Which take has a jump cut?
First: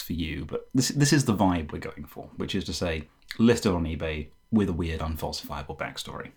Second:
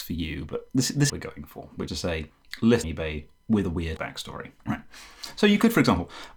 second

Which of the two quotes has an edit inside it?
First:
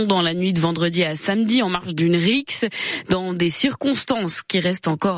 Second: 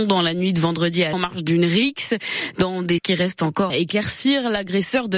second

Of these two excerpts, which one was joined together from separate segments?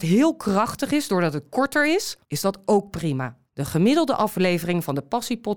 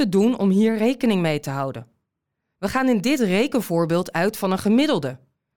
first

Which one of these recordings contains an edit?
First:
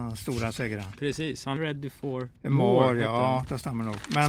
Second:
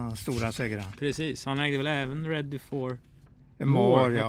first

